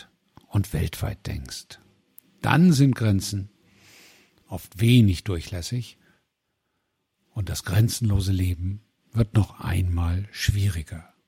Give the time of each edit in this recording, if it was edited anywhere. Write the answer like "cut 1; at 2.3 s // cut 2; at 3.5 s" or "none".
none